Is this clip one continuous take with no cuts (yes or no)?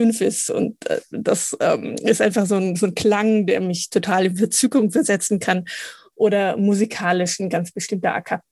yes